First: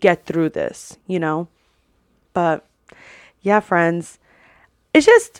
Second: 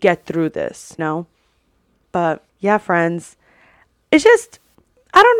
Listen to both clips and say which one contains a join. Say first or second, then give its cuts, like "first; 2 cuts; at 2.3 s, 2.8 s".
second; 2 cuts; at 1.0 s, 2.5 s